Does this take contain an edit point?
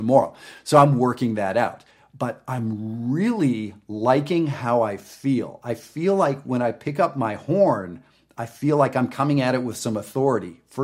no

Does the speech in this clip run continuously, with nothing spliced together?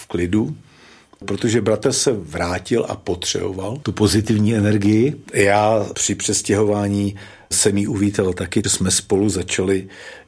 no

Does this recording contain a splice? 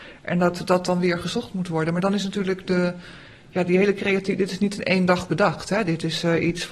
no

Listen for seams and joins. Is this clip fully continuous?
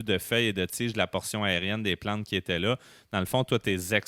yes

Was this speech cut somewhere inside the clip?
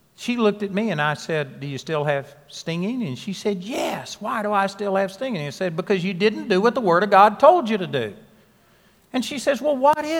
no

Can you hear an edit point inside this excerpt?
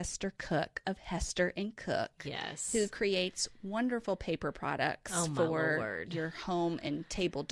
no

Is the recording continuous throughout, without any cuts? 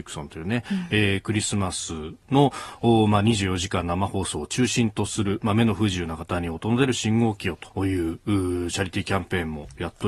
no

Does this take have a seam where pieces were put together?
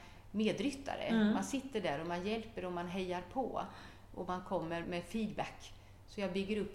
yes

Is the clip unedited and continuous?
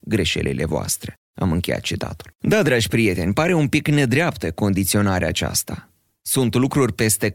no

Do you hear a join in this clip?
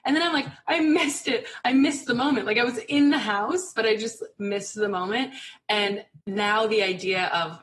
yes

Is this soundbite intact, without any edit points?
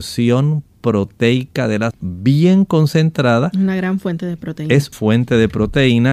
no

